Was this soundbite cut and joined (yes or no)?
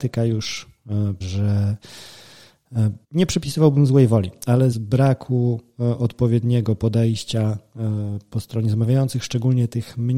yes